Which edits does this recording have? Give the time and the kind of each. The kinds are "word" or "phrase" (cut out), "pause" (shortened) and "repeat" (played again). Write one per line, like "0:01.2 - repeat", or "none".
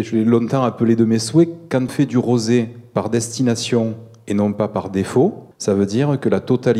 0:01.9 - word
0:05.5 - pause